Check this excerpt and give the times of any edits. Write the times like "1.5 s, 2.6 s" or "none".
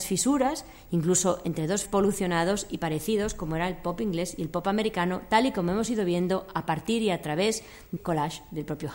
1.8 s, 8.0 s